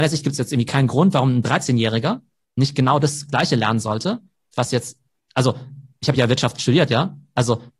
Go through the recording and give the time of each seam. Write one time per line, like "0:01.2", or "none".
none